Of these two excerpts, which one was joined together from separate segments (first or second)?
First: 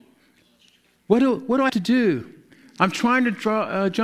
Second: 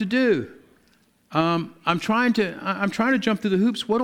first